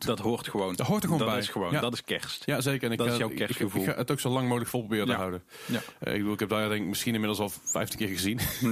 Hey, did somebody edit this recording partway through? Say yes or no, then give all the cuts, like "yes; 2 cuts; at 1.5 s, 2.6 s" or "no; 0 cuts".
no; 0 cuts